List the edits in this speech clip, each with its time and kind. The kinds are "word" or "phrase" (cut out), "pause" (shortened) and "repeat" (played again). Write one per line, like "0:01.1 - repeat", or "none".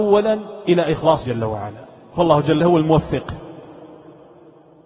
0:01.2 - word
0:02.6 - word